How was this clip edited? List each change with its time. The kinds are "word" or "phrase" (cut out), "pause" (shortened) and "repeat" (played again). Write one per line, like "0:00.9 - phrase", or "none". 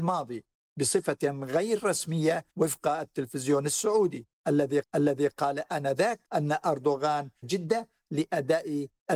0:02.5 - pause
0:04.8 - repeat
0:06.2 - pause
0:07.4 - word